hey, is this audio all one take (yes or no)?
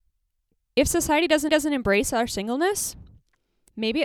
no